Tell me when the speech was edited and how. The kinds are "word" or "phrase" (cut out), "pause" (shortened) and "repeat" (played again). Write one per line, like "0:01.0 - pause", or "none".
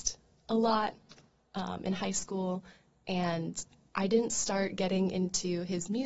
none